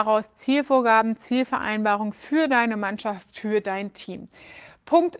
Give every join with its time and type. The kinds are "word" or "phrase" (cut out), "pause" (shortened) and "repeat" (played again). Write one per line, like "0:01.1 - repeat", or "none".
none